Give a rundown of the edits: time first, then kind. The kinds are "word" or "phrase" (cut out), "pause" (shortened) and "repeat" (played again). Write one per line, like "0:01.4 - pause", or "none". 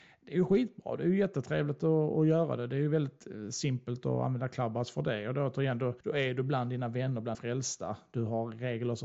0:06.0 - pause
0:07.3 - word